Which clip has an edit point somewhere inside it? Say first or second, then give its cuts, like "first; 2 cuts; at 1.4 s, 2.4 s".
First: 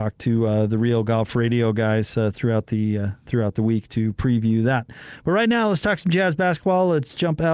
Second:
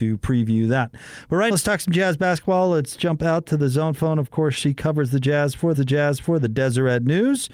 second; 2 cuts; at 1.5 s, 5.7 s